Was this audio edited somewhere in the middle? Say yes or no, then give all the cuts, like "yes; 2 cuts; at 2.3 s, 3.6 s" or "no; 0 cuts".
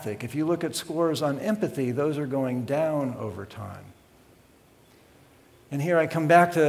no; 0 cuts